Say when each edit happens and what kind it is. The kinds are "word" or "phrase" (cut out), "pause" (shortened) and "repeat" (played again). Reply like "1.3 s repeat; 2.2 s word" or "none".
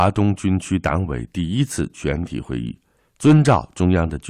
3.0 s pause

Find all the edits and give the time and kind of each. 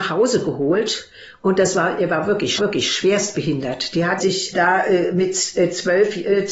2.6 s repeat; 4.2 s phrase; 4.5 s word

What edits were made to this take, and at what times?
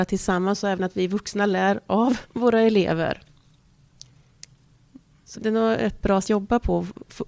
2.2 s pause; 5.3 s word; 6.2 s phrase

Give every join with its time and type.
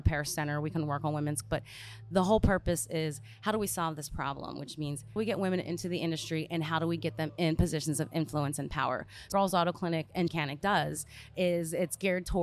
1.4 s word; 5.2 s phrase; 9.3 s phrase; 10.3 s word

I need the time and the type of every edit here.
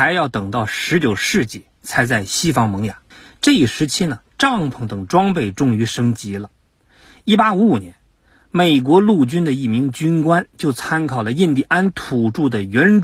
3.1 s pause; 4.3 s pause

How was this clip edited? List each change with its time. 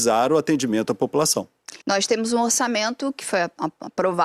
1.8 s pause

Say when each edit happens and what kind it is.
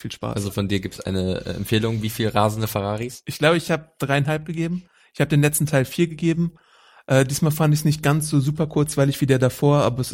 none

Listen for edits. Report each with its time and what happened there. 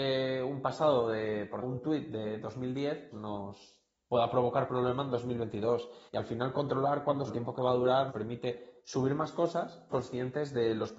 1.6 s word; 3.1 s word; 4.7 s word; 6.1 s pause; 7.3 s phrase; 8.1 s word; 8.8 s pause; 9.9 s phrase

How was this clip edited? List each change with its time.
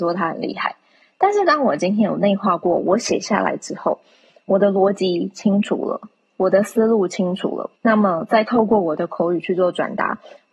7.8 s pause

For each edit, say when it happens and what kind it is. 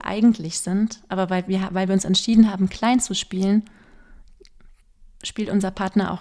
none

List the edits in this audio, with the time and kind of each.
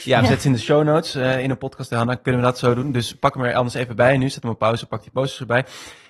none

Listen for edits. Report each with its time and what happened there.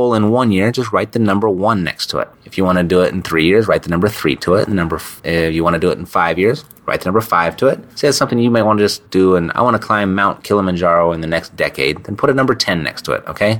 2.3 s pause; 5.2 s pause; 7.9 s pause; 9.1 s pause

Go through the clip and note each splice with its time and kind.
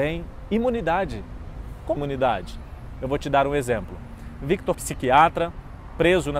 2.0 s word; 4.7 s word

